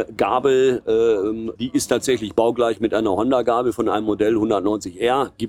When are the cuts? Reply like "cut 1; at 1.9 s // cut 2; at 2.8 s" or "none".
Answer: cut 1; at 1.6 s